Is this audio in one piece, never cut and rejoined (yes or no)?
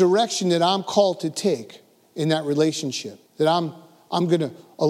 no